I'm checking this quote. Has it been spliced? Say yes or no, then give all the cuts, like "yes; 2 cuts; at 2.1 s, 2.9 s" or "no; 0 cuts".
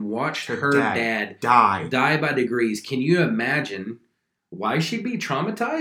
no; 0 cuts